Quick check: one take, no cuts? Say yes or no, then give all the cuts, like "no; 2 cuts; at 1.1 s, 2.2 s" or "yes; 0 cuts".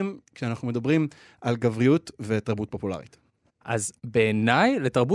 yes; 0 cuts